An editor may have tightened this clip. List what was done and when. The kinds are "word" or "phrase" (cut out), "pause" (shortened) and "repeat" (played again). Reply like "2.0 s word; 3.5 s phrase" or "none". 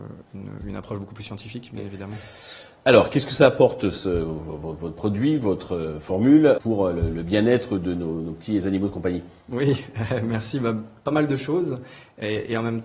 6.6 s word